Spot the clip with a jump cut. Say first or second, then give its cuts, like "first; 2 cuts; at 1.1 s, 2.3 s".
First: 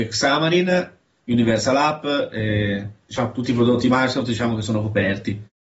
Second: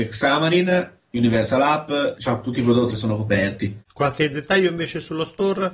second; 4 cuts; at 1.0 s, 2.1 s, 2.9 s, 3.9 s